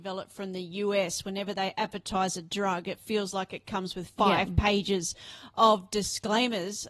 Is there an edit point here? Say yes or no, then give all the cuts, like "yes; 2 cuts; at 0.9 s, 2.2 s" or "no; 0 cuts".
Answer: no; 0 cuts